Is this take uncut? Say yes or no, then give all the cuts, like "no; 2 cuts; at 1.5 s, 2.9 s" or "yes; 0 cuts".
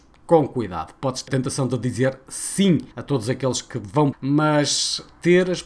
no; 3 cuts; at 1.3 s, 2.9 s, 4.1 s